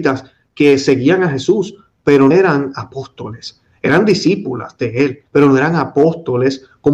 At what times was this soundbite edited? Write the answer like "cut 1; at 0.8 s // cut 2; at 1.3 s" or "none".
cut 1; at 2.3 s // cut 2; at 5.3 s